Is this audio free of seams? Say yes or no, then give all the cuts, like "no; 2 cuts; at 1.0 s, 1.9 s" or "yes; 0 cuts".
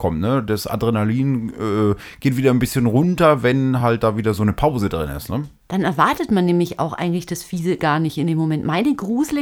yes; 0 cuts